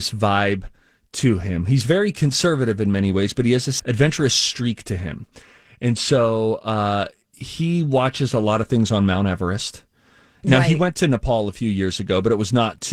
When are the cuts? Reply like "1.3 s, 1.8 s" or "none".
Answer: 3.8 s